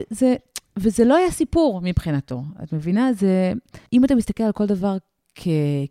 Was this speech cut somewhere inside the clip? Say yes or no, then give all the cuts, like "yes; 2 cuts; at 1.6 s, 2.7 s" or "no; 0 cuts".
yes; 1 cut; at 3.9 s